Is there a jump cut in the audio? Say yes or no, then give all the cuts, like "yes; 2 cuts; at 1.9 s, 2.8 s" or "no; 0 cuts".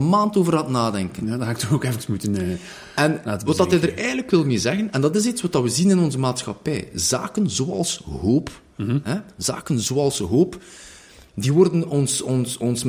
no; 0 cuts